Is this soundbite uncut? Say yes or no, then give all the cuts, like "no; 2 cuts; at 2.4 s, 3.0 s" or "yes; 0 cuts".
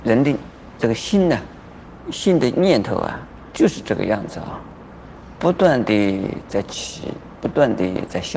no; 1 cut; at 3.5 s